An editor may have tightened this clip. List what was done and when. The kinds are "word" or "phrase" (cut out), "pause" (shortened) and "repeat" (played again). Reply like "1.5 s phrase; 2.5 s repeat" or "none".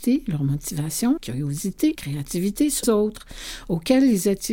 1.2 s word; 1.9 s word; 2.8 s word